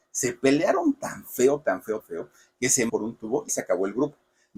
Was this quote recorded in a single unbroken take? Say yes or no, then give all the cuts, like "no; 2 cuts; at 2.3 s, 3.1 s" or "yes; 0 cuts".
no; 3 cuts; at 2.0 s, 2.9 s, 3.5 s